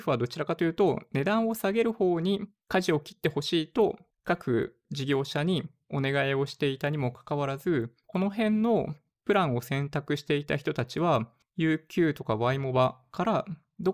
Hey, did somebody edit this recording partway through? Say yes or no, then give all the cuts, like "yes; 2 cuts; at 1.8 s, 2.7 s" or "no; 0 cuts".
no; 0 cuts